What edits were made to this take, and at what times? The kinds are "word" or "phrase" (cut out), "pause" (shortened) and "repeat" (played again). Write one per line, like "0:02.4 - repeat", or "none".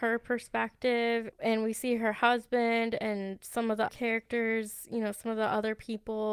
0:01.3 - word
0:03.9 - word